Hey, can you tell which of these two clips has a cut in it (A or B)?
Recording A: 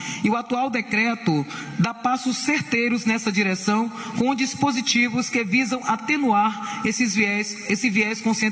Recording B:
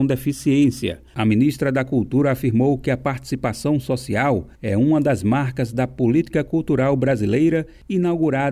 B